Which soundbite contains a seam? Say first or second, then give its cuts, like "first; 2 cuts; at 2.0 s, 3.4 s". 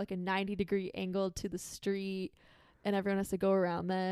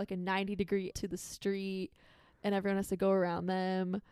second; 1 cut; at 0.9 s